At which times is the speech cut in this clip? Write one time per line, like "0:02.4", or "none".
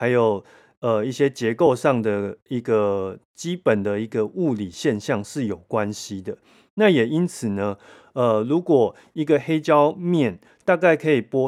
none